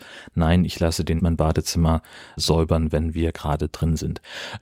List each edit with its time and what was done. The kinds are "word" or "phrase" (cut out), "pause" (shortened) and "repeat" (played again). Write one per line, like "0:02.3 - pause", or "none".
0:01.2 - word
0:02.4 - word